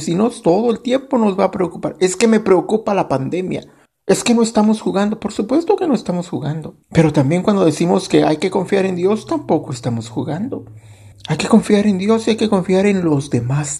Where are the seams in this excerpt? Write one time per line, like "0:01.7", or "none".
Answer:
0:03.9
0:06.8
0:11.1